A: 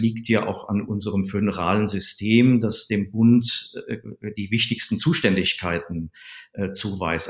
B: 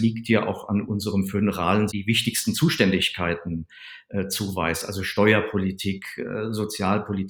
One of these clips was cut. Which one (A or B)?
B